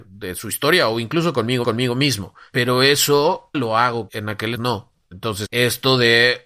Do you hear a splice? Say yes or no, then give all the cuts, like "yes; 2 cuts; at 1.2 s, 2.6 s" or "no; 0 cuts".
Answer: yes; 5 cuts; at 1.6 s, 3.5 s, 4.1 s, 4.6 s, 5.5 s